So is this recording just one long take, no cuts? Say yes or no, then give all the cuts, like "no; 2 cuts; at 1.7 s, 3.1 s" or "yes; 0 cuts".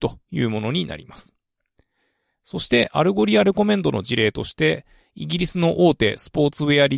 yes; 0 cuts